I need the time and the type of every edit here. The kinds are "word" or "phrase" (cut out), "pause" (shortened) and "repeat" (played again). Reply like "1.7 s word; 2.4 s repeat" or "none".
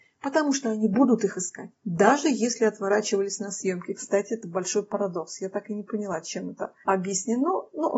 1.7 s pause